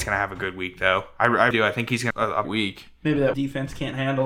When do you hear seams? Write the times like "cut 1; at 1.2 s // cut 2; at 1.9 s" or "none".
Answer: cut 1; at 1.5 s // cut 2; at 2.1 s // cut 3; at 2.4 s // cut 4; at 3.3 s